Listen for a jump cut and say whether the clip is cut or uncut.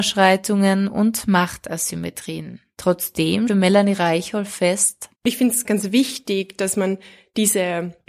cut